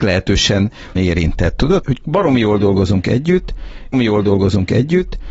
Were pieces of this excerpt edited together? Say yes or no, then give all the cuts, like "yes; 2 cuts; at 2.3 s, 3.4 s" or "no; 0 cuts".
yes; 3 cuts; at 1.0 s, 1.8 s, 3.9 s